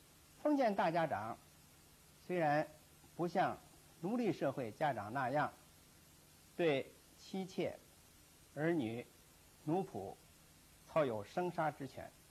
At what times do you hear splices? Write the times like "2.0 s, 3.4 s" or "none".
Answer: none